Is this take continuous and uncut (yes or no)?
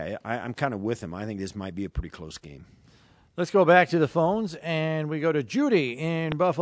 yes